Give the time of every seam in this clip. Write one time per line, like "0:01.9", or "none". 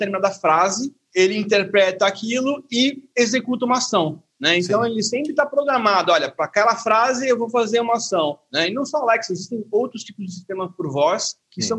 none